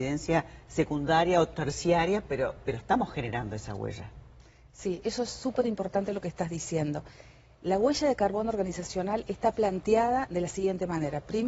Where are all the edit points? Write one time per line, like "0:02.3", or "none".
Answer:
none

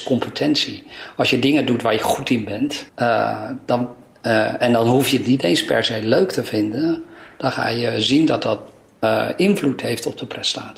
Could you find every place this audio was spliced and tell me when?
0:02.9

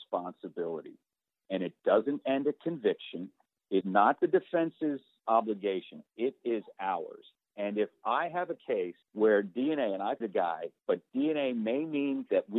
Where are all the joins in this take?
0:03.8
0:09.0
0:10.2

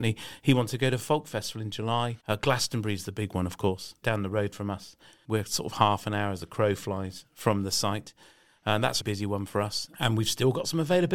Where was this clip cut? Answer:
0:02.2
0:04.0
0:09.0

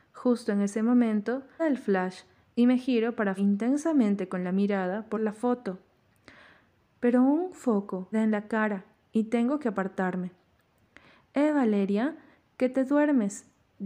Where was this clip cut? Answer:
0:01.6
0:03.4
0:05.1
0:08.1

